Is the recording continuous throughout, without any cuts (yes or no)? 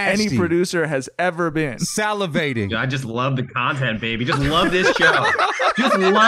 yes